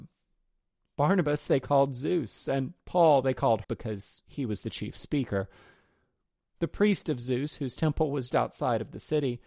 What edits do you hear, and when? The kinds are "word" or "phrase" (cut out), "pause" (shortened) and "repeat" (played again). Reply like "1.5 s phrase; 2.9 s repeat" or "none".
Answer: 3.6 s word; 8.3 s word